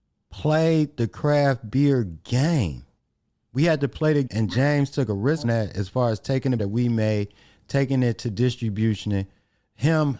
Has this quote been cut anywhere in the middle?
yes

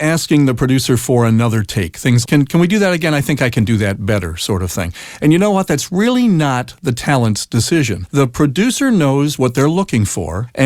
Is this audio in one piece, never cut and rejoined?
no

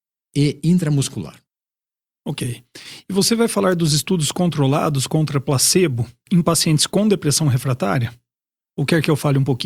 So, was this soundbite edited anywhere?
no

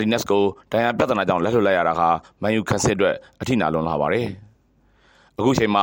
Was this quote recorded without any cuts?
yes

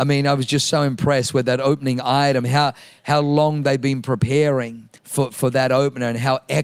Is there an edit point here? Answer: yes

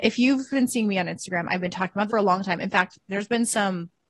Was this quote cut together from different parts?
yes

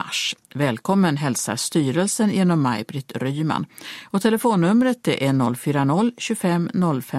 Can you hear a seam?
no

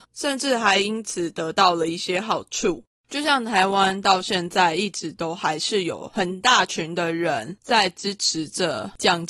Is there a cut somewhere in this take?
yes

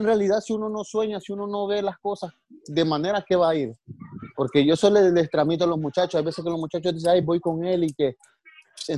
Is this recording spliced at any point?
no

